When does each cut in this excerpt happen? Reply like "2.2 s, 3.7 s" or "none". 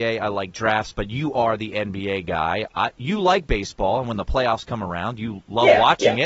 none